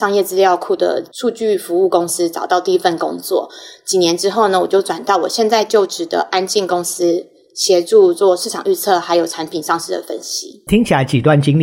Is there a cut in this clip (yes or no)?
no